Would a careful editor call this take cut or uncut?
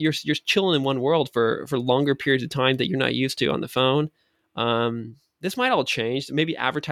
uncut